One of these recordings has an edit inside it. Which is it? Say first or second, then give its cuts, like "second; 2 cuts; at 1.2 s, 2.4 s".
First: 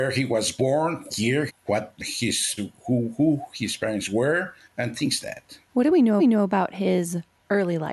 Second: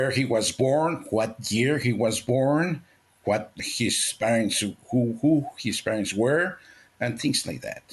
first; 7 cuts; at 1.1 s, 1.5 s, 2.6 s, 4.6 s, 5.2 s, 5.6 s, 6.2 s